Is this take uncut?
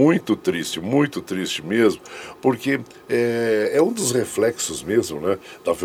yes; 0 cuts

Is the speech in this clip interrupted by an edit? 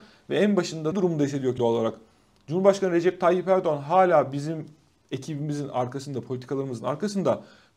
yes; 3 cuts; at 0.9 s, 1.6 s, 5.0 s

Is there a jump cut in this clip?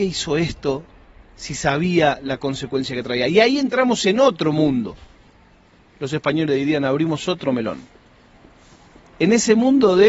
yes; 1 cut; at 1.0 s

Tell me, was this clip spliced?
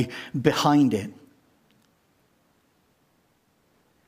no; 0 cuts

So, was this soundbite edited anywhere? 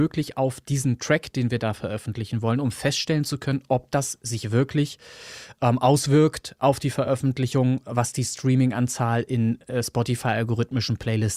no; 0 cuts

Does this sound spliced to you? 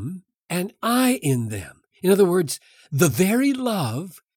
no; 0 cuts

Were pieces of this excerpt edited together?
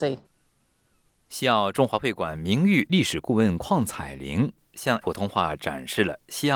yes; 1 cut; at 5.0 s

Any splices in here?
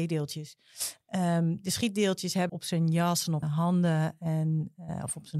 yes; 2 cuts; at 2.5 s, 3.4 s

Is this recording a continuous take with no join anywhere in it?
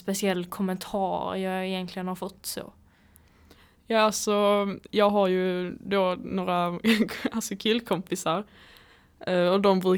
yes; 0 cuts

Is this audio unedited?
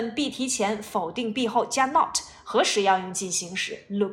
yes; 0 cuts

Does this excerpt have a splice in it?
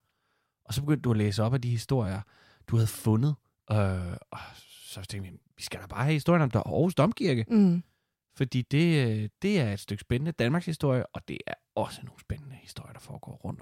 no; 0 cuts

